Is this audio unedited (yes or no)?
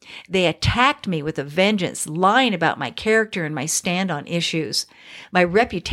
yes